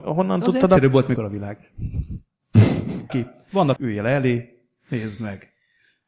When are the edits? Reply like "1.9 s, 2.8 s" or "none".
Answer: 1.2 s, 3.1 s, 3.8 s